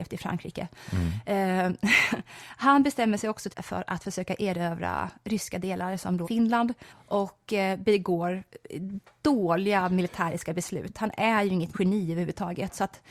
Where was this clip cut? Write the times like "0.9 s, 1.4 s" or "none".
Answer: 3.5 s, 6.2 s, 6.9 s, 11.7 s